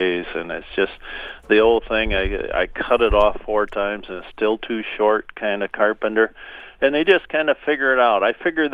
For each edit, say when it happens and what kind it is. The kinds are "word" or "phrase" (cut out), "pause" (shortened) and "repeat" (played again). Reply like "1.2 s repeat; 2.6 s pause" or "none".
none

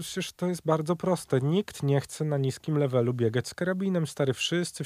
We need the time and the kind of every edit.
none

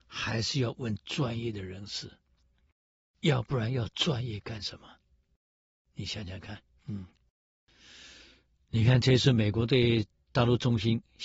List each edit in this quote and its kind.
6.8 s pause

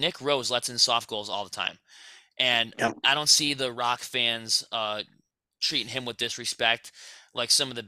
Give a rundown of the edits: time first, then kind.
none

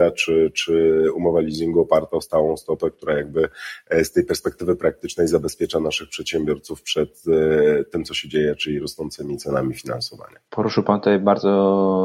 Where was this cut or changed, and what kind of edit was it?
10.5 s pause

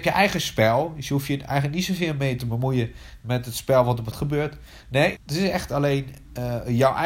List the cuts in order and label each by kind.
4.1 s word; 5.2 s word

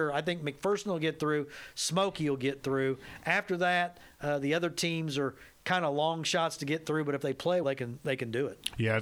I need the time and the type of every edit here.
7.6 s word

